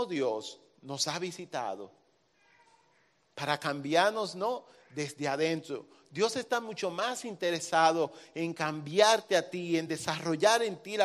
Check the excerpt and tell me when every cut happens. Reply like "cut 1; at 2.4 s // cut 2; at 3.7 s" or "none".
none